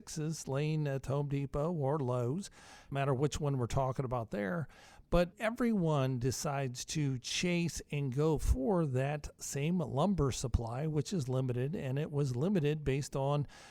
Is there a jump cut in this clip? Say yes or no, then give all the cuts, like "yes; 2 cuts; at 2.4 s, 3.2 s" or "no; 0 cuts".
yes; 2 cuts; at 2.9 s, 5.3 s